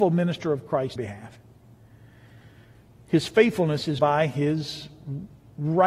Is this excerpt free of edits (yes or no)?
no